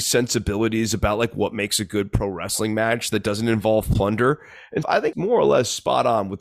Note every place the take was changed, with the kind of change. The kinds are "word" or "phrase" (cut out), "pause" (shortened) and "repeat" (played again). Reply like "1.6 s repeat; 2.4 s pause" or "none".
4.8 s word; 5.1 s word